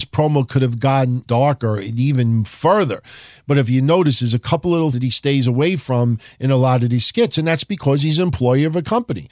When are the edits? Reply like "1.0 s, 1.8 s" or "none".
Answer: 1.3 s, 4.9 s